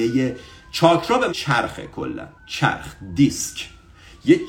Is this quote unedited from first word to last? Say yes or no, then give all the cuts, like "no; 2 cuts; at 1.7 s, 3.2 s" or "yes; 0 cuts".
no; 2 cuts; at 1.3 s, 2.4 s